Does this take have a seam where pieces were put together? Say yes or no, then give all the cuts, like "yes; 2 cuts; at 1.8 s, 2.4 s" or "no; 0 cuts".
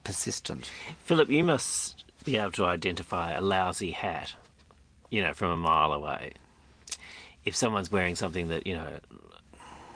no; 0 cuts